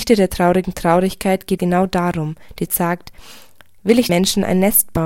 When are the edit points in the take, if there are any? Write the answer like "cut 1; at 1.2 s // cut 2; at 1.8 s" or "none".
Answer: cut 1; at 1.6 s // cut 2; at 2.7 s // cut 3; at 4.1 s

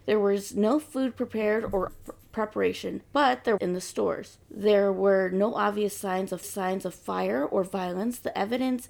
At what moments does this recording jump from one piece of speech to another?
cut 1; at 1.9 s // cut 2; at 3.0 s // cut 3; at 3.6 s // cut 4; at 4.4 s // cut 5; at 6.4 s

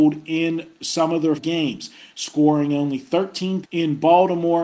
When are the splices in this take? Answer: cut 1; at 1.4 s // cut 2; at 3.6 s

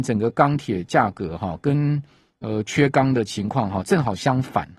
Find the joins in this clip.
none

